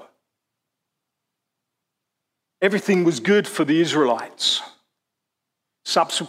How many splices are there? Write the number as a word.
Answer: zero